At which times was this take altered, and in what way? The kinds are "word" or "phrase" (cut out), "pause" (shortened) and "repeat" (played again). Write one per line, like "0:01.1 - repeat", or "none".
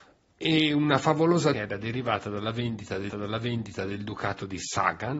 0:01.5 - phrase
0:03.1 - repeat